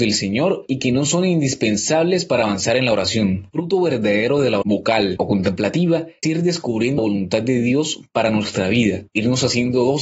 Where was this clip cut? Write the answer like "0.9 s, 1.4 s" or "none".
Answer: 4.6 s, 5.2 s, 6.2 s, 7.0 s

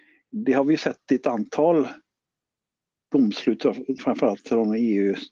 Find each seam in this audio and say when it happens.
4.0 s

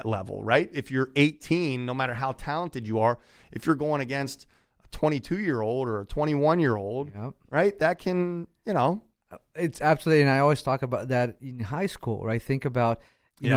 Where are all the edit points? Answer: none

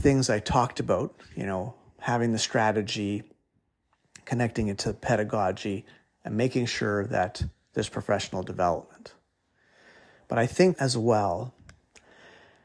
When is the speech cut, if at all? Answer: 10.8 s

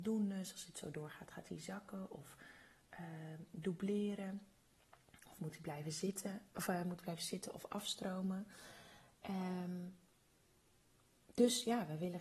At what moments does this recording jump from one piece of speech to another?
none

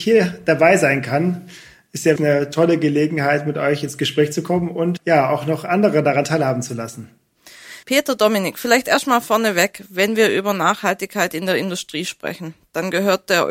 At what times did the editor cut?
2.2 s, 5.0 s, 7.8 s

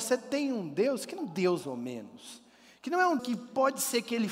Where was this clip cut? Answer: 1.2 s, 1.6 s, 3.2 s

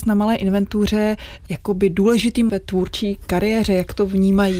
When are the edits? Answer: 2.5 s

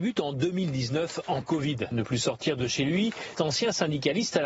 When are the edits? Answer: 1.4 s, 2.0 s, 3.3 s

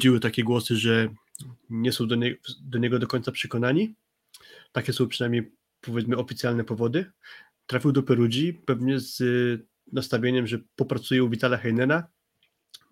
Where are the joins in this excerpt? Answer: none

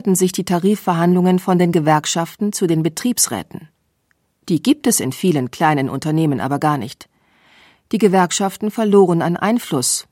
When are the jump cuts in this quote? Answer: none

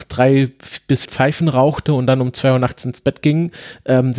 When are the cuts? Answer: 1.0 s

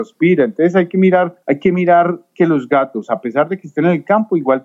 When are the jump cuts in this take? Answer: 1.4 s

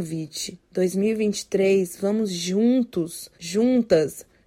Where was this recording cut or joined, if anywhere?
3.3 s

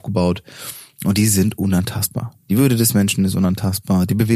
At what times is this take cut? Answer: none

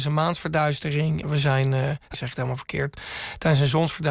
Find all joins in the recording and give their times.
1.2 s, 2.1 s

